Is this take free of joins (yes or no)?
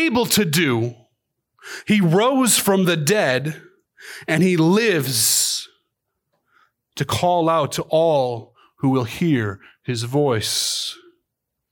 yes